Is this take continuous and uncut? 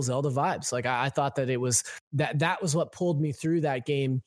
no; 1 cut; at 2.0 s

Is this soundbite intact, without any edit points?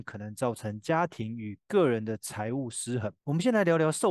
no; 1 cut; at 3.2 s

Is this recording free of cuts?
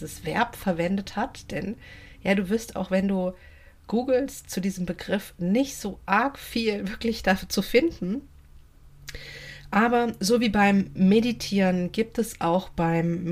yes; 0 cuts

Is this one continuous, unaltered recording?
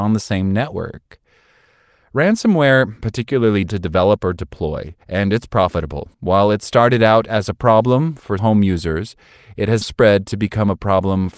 no; 6 cuts; at 3.0 s, 3.7 s, 5.0 s, 6.1 s, 8.4 s, 9.8 s

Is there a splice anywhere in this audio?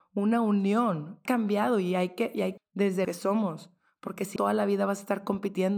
yes; 4 cuts; at 1.3 s, 2.6 s, 3.0 s, 4.4 s

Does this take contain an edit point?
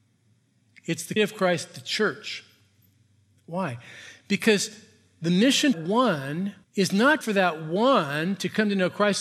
yes; 4 cuts; at 1.2 s, 5.7 s, 6.6 s, 7.2 s

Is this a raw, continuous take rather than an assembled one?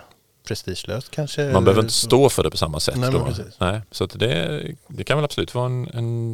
yes; 0 cuts

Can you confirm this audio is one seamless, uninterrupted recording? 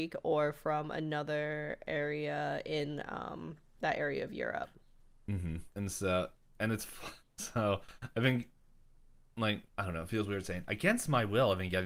no; 2 cuts; at 5.7 s, 9.7 s

